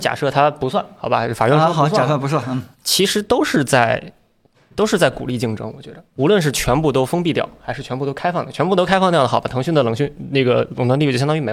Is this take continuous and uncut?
no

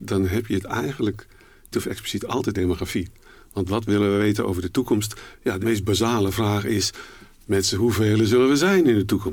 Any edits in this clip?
yes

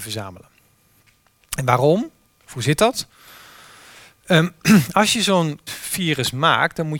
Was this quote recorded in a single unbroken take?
no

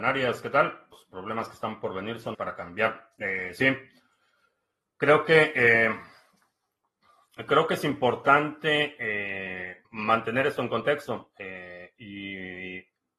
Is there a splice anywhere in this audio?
yes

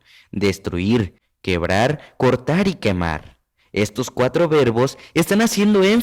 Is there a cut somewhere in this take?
no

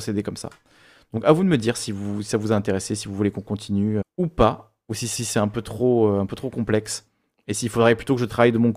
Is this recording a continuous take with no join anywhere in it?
no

